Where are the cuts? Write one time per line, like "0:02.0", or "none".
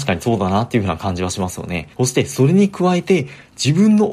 0:01.9